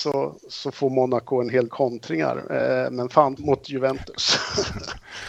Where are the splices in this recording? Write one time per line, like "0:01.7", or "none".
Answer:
0:01.7
0:03.4